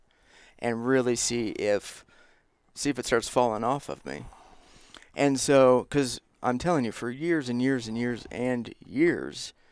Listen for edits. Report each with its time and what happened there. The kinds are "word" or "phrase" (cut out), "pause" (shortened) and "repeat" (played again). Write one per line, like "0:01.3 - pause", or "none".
none